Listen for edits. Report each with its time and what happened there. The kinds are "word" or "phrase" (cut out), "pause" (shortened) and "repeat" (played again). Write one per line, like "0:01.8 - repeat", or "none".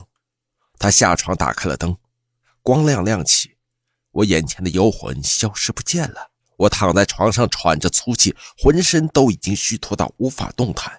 0:06.4 - pause